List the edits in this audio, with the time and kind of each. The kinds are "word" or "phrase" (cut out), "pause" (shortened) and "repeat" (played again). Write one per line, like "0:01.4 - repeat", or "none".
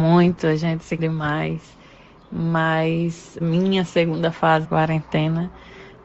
0:01.0 - word
0:03.4 - word
0:04.6 - word